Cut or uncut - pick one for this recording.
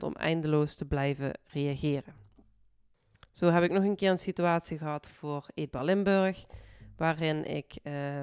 uncut